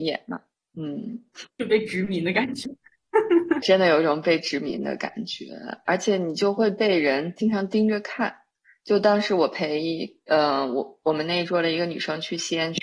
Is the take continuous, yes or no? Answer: no